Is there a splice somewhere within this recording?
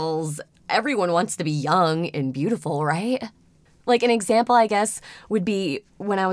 no; 0 cuts

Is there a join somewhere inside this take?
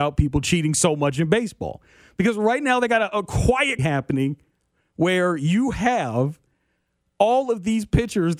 yes; 1 cut; at 3.8 s

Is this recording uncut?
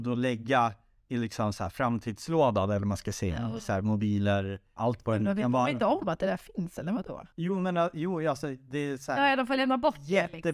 no; 2 cuts; at 4.8 s, 7.3 s

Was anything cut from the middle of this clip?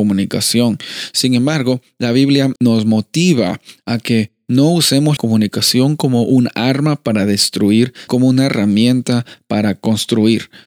yes; 3 cuts; at 2.6 s, 5.2 s, 8.1 s

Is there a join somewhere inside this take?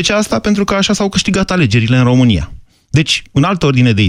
no; 0 cuts

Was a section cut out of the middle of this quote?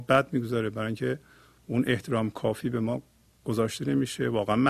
no; 0 cuts

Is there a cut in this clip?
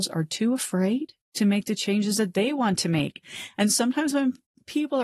yes; 1 cut; at 1.2 s

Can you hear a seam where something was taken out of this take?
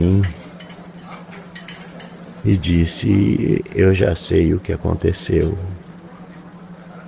no; 0 cuts

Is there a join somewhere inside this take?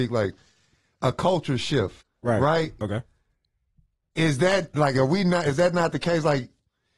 yes; 2 cuts; at 2.0 s, 2.8 s

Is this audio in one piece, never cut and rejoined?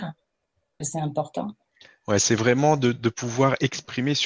no; 1 cut; at 1.7 s

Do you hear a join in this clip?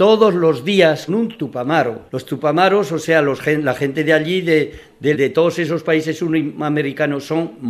yes; 3 cuts; at 1.1 s, 2.1 s, 5.1 s

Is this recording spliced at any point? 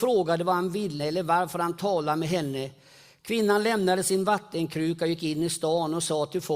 yes; 1 cut; at 1.0 s

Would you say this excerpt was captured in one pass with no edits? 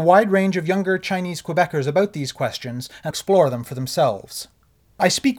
no; 1 cut; at 3.1 s

